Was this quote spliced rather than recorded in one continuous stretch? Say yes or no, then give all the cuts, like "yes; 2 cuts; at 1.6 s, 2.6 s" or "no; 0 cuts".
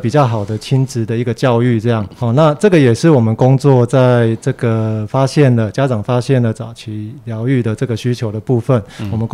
yes; 1 cut; at 2.2 s